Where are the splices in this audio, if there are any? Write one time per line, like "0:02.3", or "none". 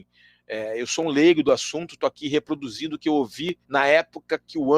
0:03.6